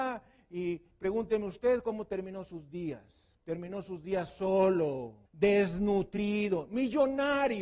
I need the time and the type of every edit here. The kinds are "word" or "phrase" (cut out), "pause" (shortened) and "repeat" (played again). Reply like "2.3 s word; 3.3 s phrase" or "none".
3.3 s pause; 5.3 s pause